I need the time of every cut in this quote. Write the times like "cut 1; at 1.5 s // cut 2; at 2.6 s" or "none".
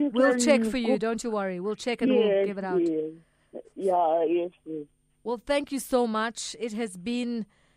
none